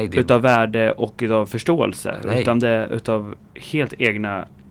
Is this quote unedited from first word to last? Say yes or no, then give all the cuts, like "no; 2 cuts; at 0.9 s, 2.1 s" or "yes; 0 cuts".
no; 1 cut; at 3.4 s